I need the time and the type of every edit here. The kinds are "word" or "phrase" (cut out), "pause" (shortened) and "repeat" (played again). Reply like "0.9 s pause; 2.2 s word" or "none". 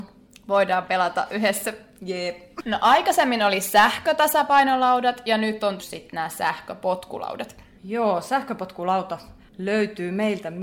5.8 s word